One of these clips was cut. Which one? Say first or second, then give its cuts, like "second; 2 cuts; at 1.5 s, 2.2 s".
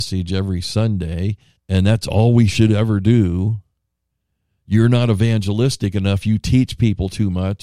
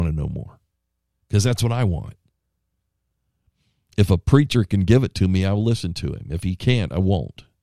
first; 1 cut; at 1.6 s